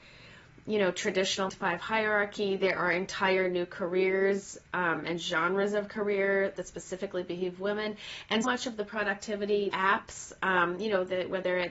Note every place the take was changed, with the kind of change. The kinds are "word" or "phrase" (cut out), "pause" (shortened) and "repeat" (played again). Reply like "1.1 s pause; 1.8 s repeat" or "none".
1.5 s word; 6.5 s phrase; 8.4 s word; 9.7 s word